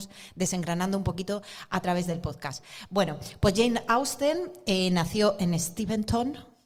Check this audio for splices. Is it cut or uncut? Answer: uncut